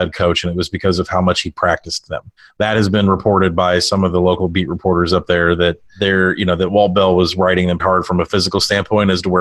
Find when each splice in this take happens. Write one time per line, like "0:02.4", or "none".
0:07.8